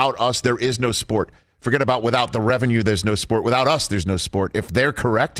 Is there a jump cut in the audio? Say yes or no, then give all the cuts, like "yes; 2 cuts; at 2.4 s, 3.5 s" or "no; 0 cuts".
no; 0 cuts